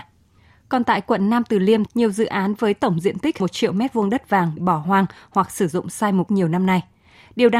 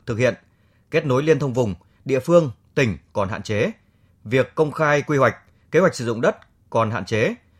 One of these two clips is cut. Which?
first; 4 cuts; at 1.9 s, 3.4 s, 4.6 s, 6.3 s

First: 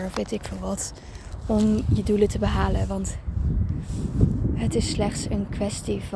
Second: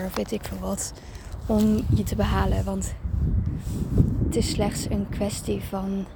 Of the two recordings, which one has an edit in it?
second; 2 cuts; at 2.0 s, 4.3 s

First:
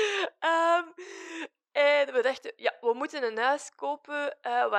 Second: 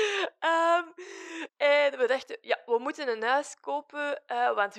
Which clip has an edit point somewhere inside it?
second; 1 cut; at 1.5 s

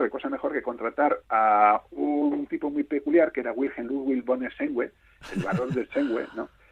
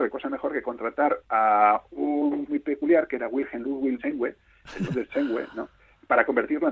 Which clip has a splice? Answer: second; 3 cuts; at 2.5 s, 4.0 s, 4.9 s

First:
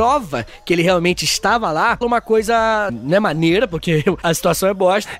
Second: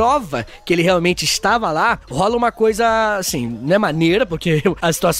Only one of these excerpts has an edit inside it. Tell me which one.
first; 2 cuts; at 2.0 s, 2.9 s

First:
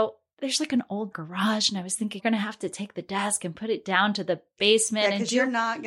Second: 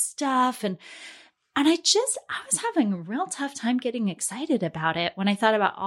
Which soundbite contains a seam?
first; 2 cuts; at 1.1 s, 2.2 s

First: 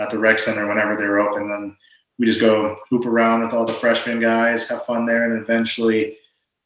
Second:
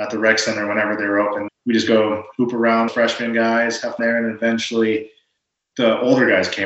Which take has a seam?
second; 4 cuts; at 1.5 s, 2.9 s, 4.0 s, 5.7 s

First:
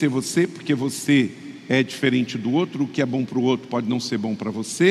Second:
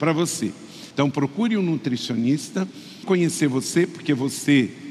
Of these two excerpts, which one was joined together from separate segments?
second; 2 cuts; at 0.9 s, 3.0 s

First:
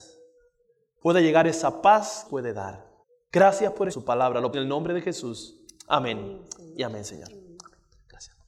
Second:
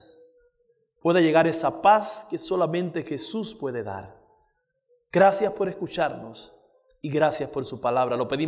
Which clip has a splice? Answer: first; 4 cuts; at 2.3 s, 3.0 s, 3.9 s, 4.5 s

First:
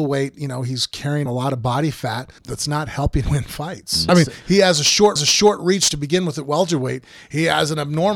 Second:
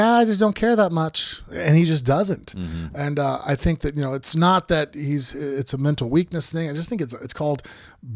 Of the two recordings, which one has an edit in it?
first; 5 cuts; at 1.3 s, 2.4 s, 3.2 s, 4.1 s, 5.2 s

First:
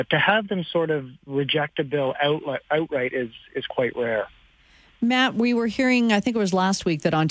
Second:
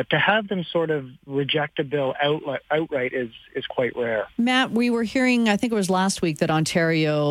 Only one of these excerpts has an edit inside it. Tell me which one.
second; 1 cut; at 4.3 s

